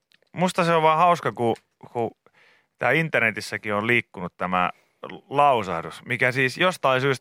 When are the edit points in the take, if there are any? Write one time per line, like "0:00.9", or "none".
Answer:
none